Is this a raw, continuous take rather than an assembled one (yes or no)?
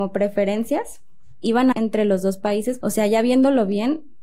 no